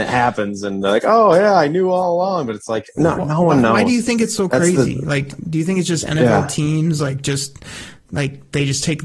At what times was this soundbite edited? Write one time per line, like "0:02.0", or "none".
none